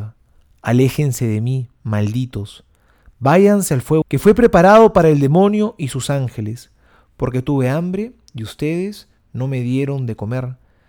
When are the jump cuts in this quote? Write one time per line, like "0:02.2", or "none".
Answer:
0:04.0